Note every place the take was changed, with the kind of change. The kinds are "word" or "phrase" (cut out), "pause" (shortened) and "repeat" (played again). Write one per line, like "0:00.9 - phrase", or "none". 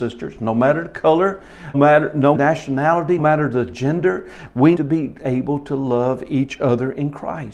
0:01.7 - word
0:02.3 - word
0:03.2 - word
0:04.7 - word

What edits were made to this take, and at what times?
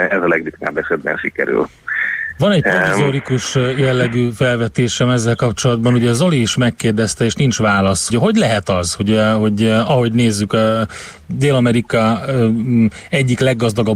0:08.1 - word

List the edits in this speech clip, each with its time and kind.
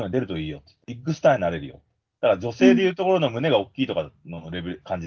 none

